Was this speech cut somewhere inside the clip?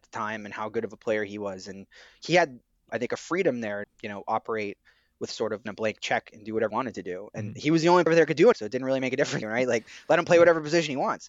yes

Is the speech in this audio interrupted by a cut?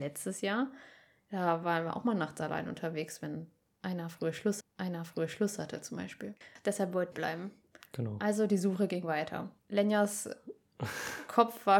yes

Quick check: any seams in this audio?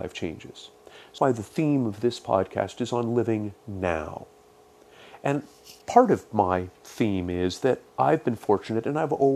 yes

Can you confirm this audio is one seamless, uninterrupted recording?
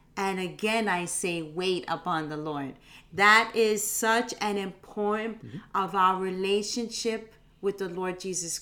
no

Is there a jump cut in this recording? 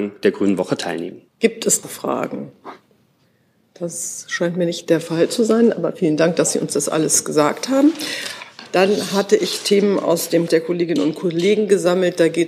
yes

